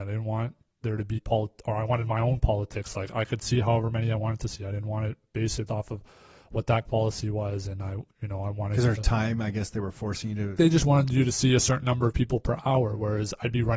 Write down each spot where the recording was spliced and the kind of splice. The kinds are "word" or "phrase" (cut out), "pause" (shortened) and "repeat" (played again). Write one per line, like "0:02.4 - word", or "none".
0:01.2 - word
0:05.7 - word
0:06.9 - word
0:10.6 - word